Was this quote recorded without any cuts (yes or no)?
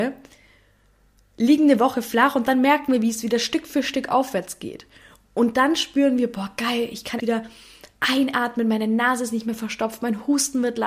no